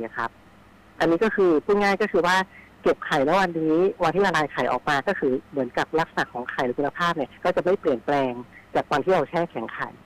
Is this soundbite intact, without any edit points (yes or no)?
no